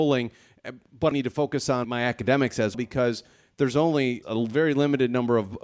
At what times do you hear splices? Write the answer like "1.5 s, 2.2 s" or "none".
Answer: 1.1 s, 1.8 s, 2.7 s, 4.2 s